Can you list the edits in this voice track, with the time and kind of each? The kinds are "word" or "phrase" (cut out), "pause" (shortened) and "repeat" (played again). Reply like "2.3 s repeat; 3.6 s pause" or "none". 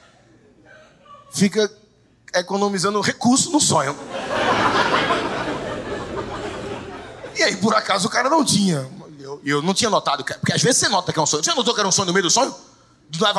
none